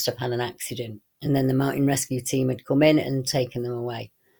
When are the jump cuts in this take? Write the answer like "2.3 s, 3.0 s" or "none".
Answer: none